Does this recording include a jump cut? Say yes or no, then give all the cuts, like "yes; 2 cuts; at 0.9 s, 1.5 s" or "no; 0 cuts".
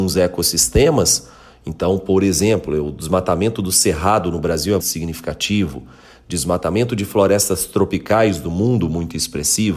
yes; 1 cut; at 4.8 s